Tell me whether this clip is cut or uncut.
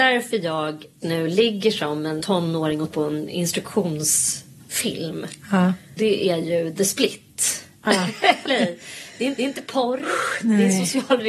cut